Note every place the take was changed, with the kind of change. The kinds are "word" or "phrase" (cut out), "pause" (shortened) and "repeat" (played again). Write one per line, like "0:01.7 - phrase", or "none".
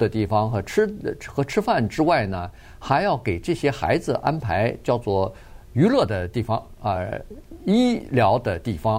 none